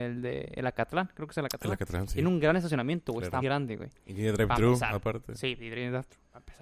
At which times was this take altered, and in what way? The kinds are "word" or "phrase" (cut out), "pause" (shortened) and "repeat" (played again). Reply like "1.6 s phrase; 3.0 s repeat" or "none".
3.4 s word